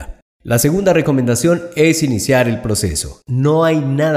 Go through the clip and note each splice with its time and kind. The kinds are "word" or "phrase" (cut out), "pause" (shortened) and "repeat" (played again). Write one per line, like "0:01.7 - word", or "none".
none